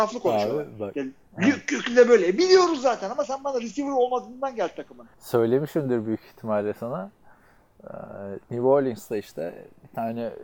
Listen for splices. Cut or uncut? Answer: cut